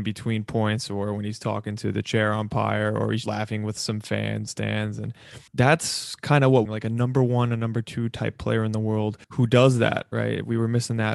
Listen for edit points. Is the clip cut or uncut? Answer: cut